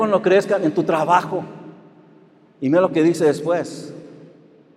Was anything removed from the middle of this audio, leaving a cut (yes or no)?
no